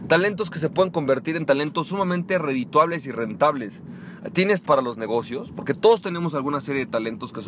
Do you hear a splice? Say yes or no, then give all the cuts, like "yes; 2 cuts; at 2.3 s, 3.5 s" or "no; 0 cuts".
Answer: yes; 1 cut; at 4.6 s